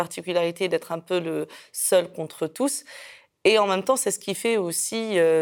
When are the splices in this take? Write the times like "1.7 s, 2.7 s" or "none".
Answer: none